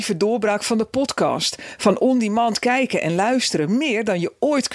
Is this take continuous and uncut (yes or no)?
yes